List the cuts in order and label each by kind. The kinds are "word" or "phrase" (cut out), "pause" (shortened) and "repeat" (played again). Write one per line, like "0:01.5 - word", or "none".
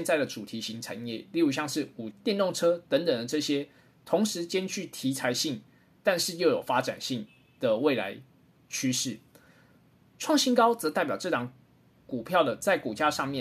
0:02.1 - word